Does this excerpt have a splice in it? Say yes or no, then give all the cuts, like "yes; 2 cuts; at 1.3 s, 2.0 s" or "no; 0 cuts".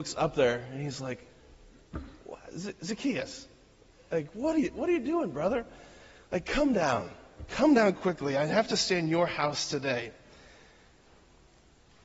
no; 0 cuts